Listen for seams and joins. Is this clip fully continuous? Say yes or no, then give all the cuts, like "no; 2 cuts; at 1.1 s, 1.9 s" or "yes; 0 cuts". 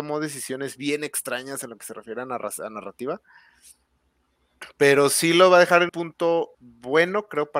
no; 2 cuts; at 5.9 s, 6.5 s